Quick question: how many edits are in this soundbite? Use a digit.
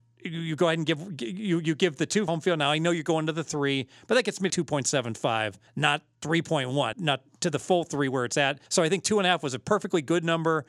5